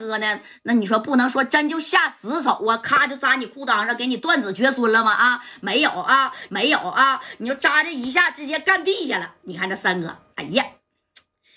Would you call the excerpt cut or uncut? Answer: cut